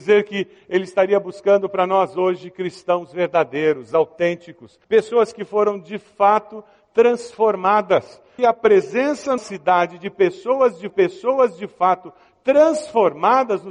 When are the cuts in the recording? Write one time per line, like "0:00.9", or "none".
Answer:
0:04.8
0:08.4
0:09.4
0:10.9